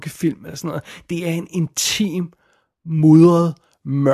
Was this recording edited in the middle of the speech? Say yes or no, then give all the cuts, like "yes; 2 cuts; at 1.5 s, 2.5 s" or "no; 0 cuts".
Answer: no; 0 cuts